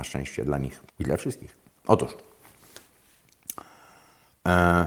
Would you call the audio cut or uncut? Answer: cut